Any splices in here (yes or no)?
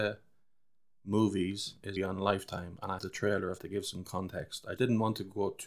yes